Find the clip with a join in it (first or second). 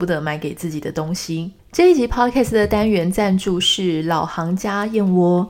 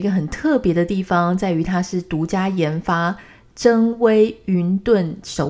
first